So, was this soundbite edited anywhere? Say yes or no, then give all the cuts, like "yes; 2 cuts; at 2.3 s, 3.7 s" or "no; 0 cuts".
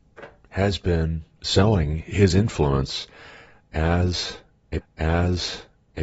yes; 1 cut; at 4.8 s